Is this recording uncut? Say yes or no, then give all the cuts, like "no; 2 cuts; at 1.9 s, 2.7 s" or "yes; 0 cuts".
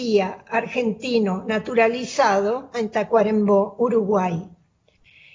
no; 1 cut; at 2.7 s